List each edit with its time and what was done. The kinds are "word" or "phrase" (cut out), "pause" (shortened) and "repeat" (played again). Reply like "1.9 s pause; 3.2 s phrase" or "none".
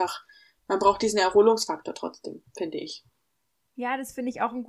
none